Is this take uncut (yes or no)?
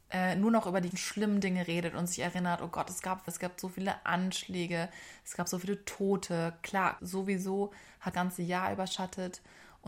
no